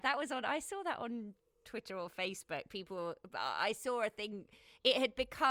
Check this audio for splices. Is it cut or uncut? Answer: uncut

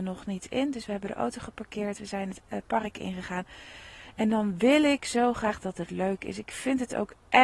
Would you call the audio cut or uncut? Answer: uncut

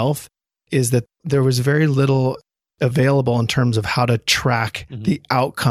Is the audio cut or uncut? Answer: uncut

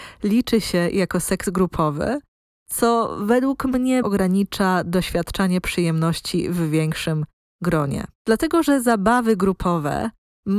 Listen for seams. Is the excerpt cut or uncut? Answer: cut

